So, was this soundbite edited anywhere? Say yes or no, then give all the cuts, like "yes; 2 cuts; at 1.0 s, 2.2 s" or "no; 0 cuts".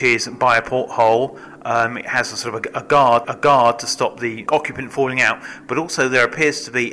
yes; 2 cuts; at 3.2 s, 4.5 s